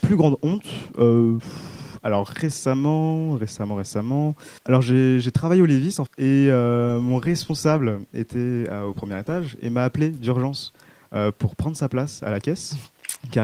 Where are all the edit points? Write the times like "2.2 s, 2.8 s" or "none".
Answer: 4.6 s, 6.1 s